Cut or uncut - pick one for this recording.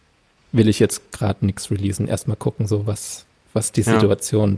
uncut